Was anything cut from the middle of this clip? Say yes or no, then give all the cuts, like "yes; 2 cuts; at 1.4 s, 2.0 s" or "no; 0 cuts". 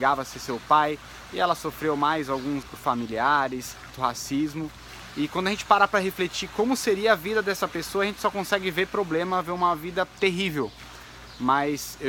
yes; 2 cuts; at 2.6 s, 3.9 s